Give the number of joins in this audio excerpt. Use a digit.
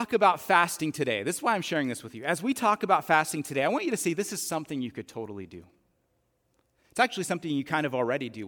0